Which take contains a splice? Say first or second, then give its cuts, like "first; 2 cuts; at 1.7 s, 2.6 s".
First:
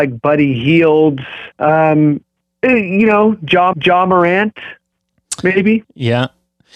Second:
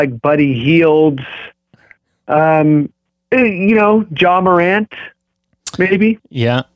first; 2 cuts; at 1.5 s, 3.7 s